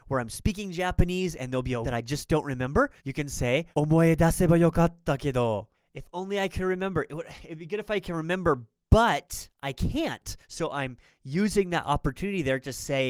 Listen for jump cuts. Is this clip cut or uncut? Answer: cut